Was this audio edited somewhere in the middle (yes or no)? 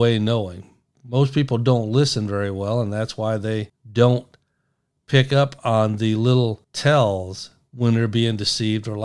yes